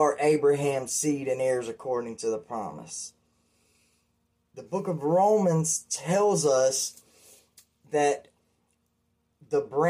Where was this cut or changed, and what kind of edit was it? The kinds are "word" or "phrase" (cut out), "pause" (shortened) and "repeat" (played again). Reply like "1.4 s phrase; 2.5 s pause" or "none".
none